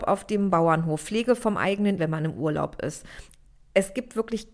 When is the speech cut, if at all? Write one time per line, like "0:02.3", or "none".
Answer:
0:02.0